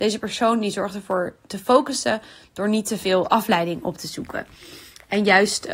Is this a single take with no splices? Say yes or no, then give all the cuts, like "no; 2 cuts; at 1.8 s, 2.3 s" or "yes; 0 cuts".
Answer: yes; 0 cuts